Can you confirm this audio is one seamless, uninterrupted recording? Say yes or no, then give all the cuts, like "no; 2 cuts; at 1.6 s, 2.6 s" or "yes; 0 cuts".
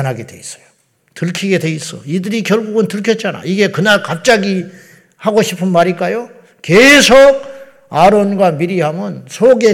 yes; 0 cuts